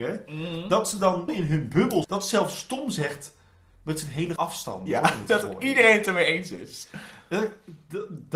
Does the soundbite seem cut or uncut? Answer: cut